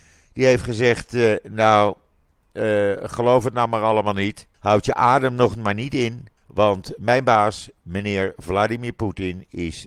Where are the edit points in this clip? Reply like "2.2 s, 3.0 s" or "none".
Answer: 4.5 s, 6.4 s